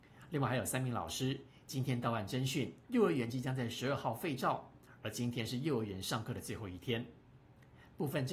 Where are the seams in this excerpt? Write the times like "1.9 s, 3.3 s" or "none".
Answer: 2.8 s